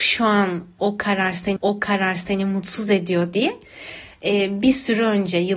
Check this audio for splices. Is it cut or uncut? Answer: cut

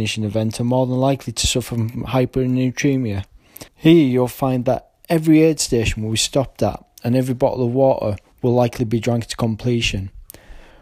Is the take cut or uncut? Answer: cut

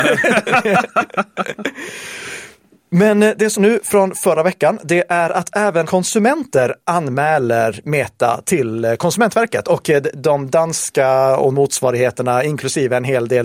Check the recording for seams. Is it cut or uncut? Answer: cut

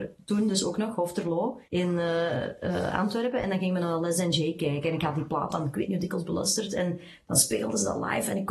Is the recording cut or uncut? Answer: cut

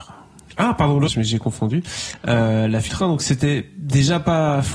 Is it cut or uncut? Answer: cut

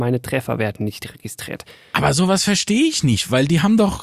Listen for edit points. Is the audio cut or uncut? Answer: uncut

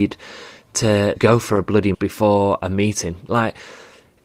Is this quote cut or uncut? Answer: cut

